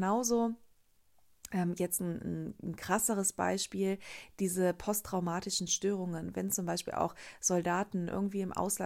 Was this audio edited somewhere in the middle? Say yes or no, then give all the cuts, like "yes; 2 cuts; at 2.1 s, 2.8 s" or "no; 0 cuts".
no; 0 cuts